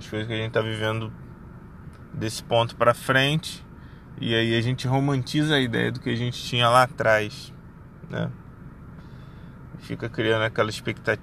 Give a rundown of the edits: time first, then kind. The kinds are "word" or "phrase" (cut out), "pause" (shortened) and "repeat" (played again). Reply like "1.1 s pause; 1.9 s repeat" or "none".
none